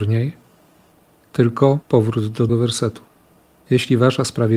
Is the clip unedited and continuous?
no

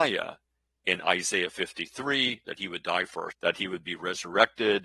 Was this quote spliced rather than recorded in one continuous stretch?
yes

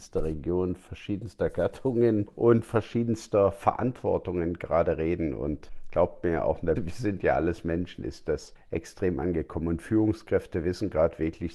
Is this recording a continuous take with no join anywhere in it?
no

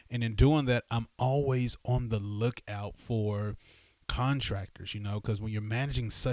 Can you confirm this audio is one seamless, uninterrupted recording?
yes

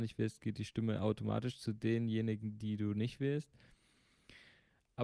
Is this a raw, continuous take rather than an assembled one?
yes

